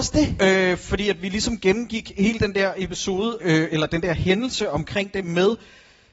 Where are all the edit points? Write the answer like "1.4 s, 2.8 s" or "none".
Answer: 3.4 s

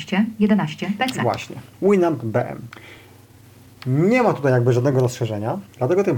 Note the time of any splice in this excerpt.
none

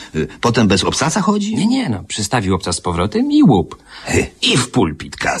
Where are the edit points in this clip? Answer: none

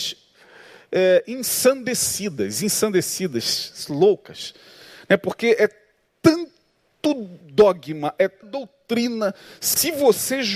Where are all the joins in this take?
7.4 s, 8.4 s

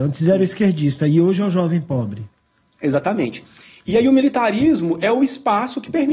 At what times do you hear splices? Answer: none

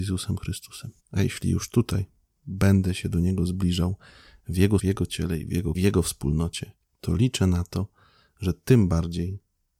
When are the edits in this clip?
1.0 s, 4.8 s, 5.7 s, 6.8 s

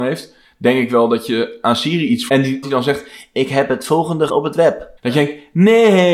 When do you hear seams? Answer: 2.3 s, 2.6 s, 4.3 s, 5.0 s

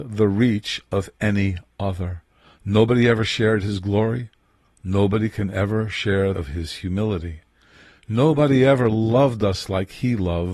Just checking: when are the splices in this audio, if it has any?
6.3 s

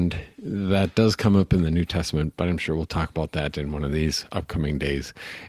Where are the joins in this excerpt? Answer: none

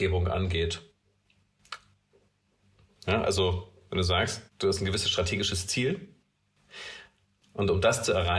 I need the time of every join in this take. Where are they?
4.5 s

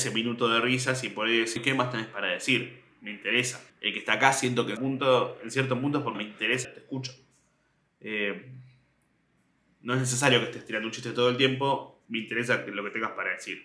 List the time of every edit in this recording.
1.6 s, 3.7 s, 4.8 s, 6.1 s, 6.6 s, 12.0 s

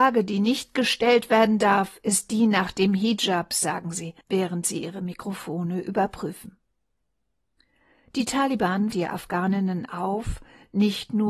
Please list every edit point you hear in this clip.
4.2 s, 8.9 s

